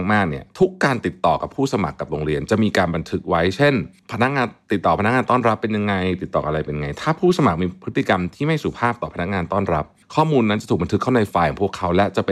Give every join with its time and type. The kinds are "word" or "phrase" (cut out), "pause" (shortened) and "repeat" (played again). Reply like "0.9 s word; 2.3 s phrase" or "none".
10.0 s pause